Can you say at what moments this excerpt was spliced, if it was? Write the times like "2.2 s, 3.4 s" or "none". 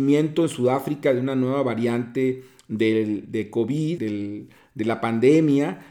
4.0 s